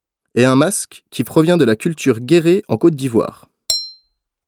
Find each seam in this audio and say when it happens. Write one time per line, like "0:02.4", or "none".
none